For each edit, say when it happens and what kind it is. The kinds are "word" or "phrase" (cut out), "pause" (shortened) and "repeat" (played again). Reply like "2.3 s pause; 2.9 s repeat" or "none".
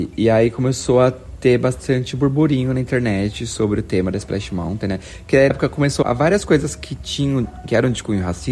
5.5 s word; 6.0 s word